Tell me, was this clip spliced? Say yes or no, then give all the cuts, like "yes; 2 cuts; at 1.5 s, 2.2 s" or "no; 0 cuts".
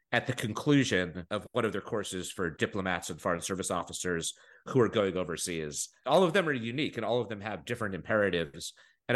no; 0 cuts